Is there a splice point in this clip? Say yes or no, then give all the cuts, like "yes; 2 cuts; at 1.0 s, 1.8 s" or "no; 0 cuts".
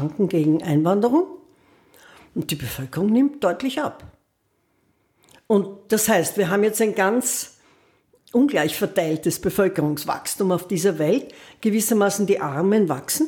no; 0 cuts